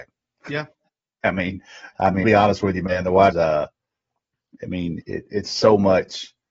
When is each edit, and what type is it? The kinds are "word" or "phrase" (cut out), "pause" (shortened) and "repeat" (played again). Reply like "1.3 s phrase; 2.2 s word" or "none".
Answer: 1.9 s word; 2.2 s word; 3.3 s word; 5.0 s word